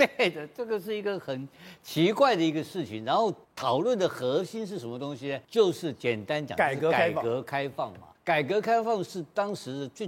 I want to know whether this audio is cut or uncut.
cut